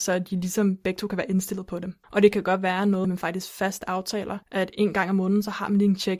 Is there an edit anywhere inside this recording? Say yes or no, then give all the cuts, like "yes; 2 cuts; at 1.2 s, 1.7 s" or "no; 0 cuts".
yes; 3 cuts; at 2.0 s, 3.0 s, 4.4 s